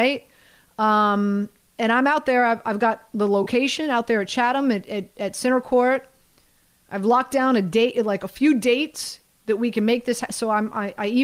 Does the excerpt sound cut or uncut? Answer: uncut